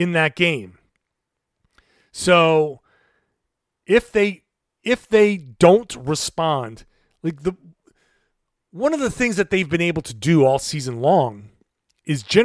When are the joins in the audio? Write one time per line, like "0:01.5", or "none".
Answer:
none